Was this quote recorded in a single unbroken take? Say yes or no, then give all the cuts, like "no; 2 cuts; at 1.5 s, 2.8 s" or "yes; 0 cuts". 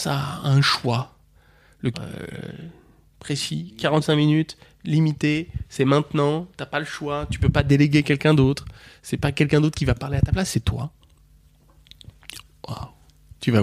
no; 1 cut; at 1.9 s